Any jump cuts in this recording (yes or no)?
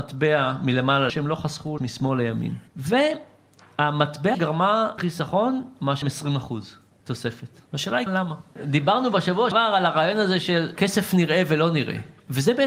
yes